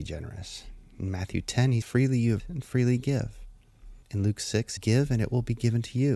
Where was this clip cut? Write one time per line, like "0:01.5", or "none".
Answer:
0:01.8
0:02.4
0:04.0
0:04.8